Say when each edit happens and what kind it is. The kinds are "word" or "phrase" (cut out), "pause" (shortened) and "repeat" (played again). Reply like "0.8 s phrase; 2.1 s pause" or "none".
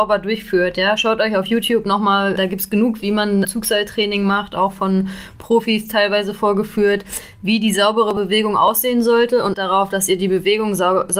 2.4 s word; 3.0 s word; 3.4 s word; 9.5 s word